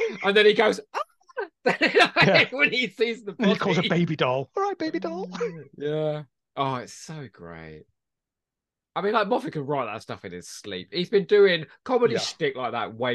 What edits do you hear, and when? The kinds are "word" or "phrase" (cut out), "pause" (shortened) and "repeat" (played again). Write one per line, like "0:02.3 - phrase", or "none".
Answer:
none